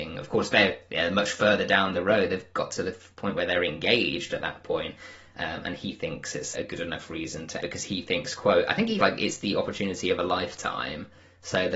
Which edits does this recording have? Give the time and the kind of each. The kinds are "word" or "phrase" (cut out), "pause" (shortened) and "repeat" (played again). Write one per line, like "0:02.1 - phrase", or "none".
0:03.1 - pause
0:06.5 - word
0:07.6 - phrase
0:09.0 - phrase